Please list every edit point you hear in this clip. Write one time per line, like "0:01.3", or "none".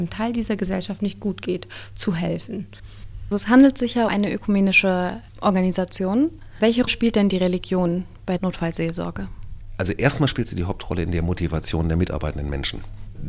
0:04.1
0:06.9
0:08.4